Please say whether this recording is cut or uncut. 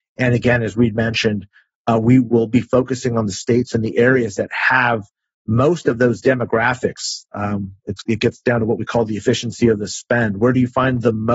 uncut